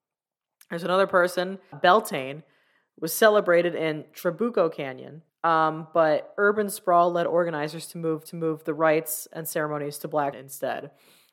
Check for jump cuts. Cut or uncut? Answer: cut